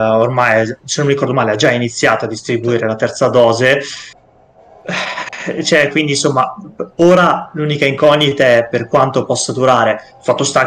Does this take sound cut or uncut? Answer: uncut